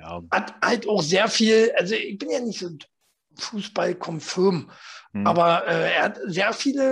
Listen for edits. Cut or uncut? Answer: uncut